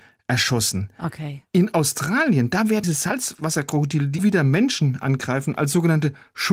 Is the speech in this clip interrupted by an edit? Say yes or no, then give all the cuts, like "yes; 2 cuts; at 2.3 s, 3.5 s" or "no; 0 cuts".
yes; 2 cuts; at 2.8 s, 4.2 s